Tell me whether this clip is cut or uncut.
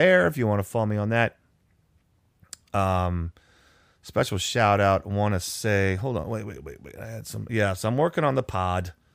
uncut